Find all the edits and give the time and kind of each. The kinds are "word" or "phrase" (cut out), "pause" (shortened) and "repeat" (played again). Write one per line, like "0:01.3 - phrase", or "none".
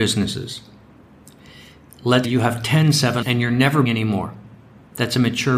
0:02.2 - word
0:03.2 - word
0:03.9 - word